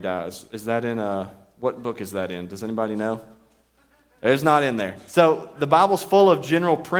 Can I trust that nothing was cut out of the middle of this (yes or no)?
yes